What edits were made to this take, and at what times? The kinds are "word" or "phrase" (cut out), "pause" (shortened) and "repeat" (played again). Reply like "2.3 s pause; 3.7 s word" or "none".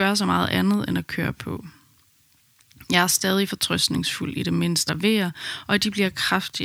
4.9 s word

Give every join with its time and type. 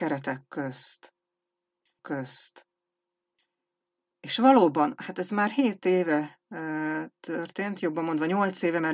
2.0 s repeat

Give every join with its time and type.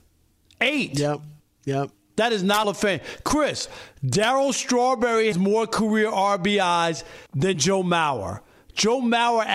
1.4 s pause; 2.6 s word; 5.3 s word; 7.3 s pause

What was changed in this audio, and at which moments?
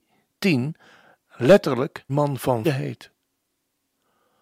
2.1 s word; 2.6 s word

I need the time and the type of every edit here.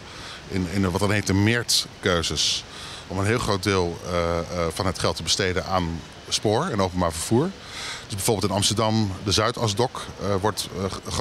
none

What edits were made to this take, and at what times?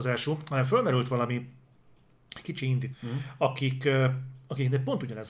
2.9 s word

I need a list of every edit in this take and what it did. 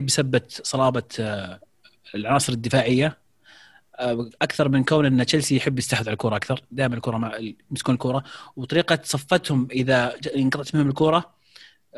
none

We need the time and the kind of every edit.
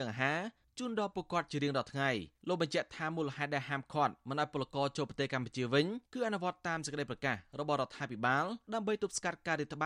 2.3 s pause; 6.0 s pause; 8.6 s pause

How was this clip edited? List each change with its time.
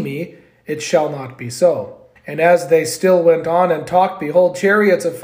2.2 s pause

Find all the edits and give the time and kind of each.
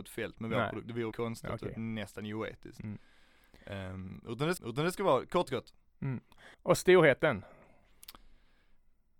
1.1 s word; 4.6 s repeat; 5.5 s word; 6.5 s pause

